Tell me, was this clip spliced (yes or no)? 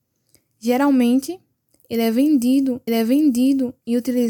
yes